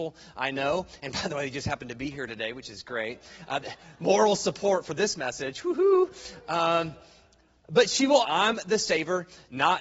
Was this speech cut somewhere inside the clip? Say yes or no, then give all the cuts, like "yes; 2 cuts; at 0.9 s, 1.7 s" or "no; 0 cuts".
yes; 1 cut; at 8.2 s